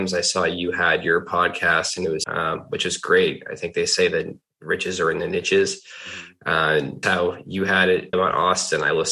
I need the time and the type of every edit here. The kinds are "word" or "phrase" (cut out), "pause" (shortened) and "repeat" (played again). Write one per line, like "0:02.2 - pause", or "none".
0:02.2 - phrase
0:07.0 - word
0:08.1 - word